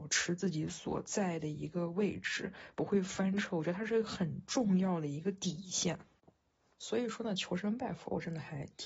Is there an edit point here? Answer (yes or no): no